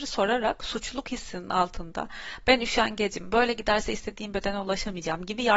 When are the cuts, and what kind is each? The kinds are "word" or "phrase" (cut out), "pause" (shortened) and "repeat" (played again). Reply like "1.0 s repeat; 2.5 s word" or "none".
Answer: none

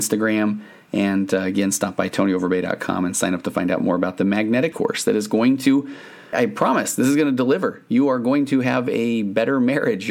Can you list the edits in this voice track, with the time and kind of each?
4.7 s word; 6.3 s word

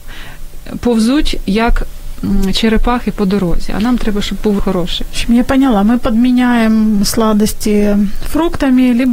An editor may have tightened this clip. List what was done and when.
4.6 s word

